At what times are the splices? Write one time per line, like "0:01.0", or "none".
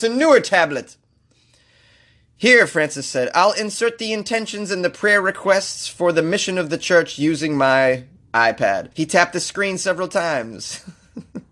0:08.9